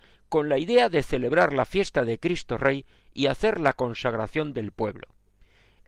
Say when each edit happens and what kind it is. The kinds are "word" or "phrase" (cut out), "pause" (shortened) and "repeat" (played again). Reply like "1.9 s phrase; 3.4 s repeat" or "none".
none